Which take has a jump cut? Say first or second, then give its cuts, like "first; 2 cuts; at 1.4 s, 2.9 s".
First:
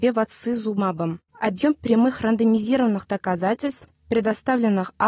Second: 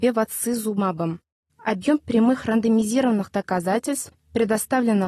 first; 1 cut; at 1.3 s